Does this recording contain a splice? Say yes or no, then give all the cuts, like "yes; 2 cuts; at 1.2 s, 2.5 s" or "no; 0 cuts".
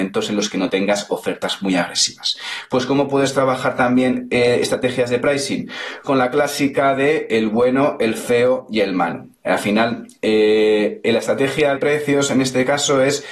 yes; 2 cuts; at 6.0 s, 11.8 s